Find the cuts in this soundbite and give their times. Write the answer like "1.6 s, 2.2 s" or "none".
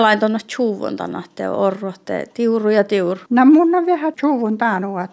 3.3 s, 4.1 s